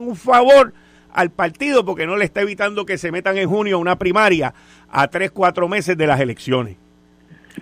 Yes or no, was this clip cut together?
no